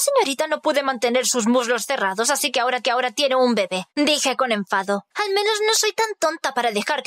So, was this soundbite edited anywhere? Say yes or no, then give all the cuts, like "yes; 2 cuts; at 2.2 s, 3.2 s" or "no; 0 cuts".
yes; 3 cuts; at 2.8 s, 3.9 s, 5.1 s